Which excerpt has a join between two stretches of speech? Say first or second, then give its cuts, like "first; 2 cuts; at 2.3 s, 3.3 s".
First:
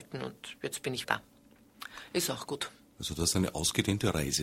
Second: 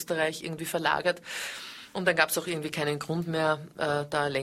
first; 1 cut; at 1.0 s